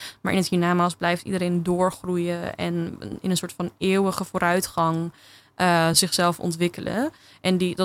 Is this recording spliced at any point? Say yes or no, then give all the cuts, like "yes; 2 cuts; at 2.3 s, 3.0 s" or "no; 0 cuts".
no; 0 cuts